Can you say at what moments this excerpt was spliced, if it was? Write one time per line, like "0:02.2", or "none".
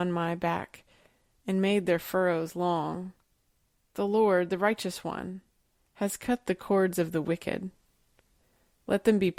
none

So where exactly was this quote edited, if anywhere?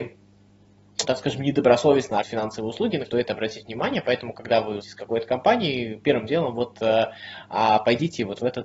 0:01.0
0:02.2
0:03.1
0:04.8

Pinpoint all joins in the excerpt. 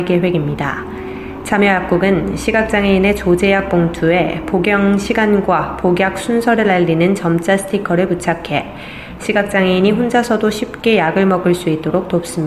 none

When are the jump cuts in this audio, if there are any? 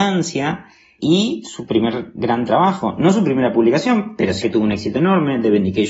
0:04.4

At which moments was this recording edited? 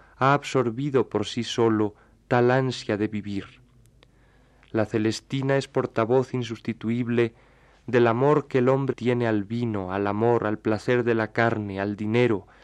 0:08.9

